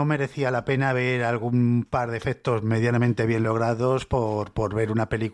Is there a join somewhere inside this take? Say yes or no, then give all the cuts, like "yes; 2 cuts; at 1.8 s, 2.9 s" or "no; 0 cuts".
no; 0 cuts